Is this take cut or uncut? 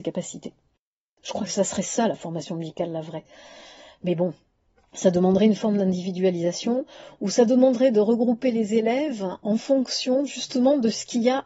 uncut